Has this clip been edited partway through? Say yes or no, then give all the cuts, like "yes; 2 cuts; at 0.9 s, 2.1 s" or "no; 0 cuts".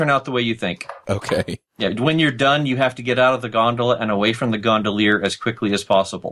yes; 1 cut; at 1.7 s